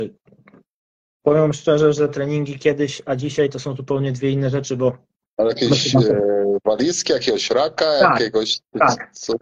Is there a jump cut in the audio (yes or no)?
no